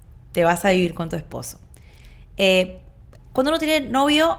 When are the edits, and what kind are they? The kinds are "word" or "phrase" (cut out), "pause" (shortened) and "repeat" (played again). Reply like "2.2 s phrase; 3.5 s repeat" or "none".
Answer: none